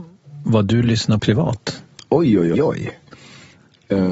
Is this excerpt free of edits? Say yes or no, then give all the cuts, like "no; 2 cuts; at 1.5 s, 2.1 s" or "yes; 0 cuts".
no; 2 cuts; at 1.2 s, 2.5 s